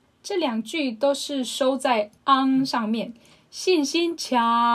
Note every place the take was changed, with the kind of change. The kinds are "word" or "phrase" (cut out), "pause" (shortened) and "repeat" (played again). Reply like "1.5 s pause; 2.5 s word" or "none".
2.2 s pause